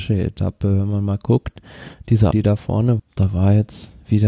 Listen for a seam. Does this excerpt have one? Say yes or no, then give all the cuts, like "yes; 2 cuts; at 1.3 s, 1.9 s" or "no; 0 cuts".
yes; 2 cuts; at 2.3 s, 3.0 s